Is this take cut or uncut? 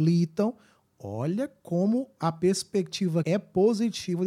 cut